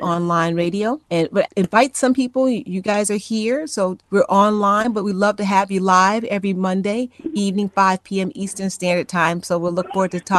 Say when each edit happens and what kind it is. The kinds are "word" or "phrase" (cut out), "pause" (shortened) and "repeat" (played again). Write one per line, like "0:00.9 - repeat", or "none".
0:01.0 - pause
0:01.5 - phrase
0:04.0 - pause

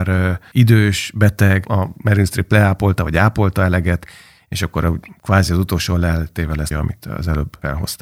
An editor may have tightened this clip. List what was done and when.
0:06.7 - word

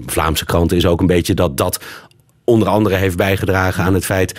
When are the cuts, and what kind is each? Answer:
none

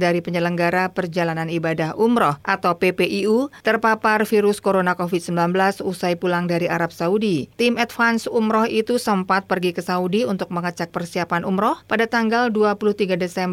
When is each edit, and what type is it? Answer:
0:02.4 - pause
0:03.6 - pause
0:07.5 - pause
0:11.8 - pause

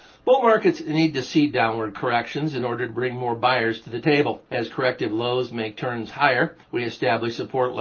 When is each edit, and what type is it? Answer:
0:04.5 - pause
0:06.6 - pause

